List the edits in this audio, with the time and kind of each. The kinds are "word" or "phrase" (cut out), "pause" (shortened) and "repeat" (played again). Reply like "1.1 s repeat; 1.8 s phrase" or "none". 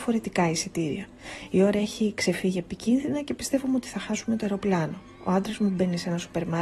none